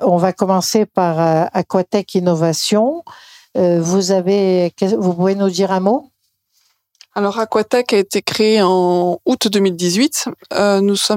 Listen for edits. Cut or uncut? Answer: uncut